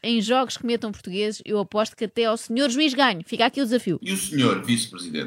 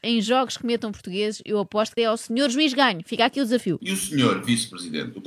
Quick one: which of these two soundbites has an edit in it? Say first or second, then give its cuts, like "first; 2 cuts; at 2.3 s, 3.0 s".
second; 1 cut; at 2.0 s